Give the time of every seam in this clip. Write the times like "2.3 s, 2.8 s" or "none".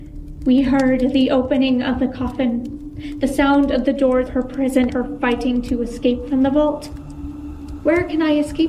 4.3 s, 4.9 s